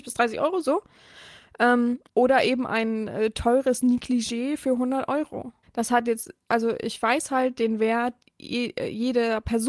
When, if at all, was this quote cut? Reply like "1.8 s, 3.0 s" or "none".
2.1 s, 5.6 s

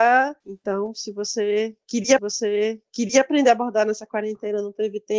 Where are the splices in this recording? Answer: 2.2 s

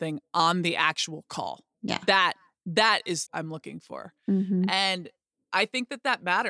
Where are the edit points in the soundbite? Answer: 1.7 s, 3.3 s

